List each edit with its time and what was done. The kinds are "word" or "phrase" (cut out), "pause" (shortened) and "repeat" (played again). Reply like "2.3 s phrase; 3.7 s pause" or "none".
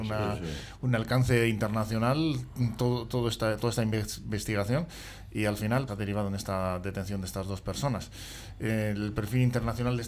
5.9 s word